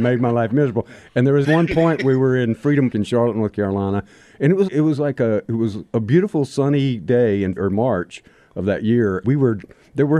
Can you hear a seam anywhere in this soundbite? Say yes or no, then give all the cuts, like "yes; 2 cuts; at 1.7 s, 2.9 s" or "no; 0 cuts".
yes; 5 cuts; at 1.4 s, 2.9 s, 4.7 s, 7.6 s, 9.2 s